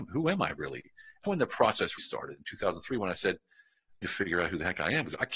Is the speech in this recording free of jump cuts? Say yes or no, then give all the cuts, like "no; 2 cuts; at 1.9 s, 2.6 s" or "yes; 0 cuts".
no; 3 cuts; at 1.2 s, 2.0 s, 4.0 s